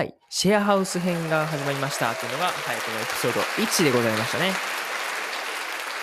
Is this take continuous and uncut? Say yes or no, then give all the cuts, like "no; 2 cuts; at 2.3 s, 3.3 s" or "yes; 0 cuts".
yes; 0 cuts